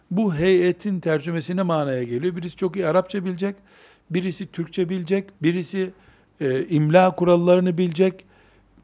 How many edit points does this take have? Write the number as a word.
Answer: one